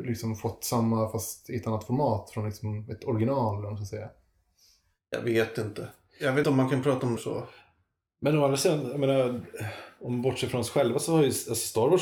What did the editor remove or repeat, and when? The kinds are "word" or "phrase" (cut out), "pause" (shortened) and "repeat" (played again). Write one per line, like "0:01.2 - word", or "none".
0:06.4 - word
0:07.2 - word